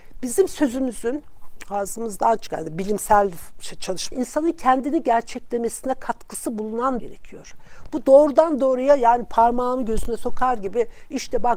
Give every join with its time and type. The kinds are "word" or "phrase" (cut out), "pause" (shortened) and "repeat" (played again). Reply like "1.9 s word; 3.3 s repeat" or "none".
4.1 s phrase; 7.0 s phrase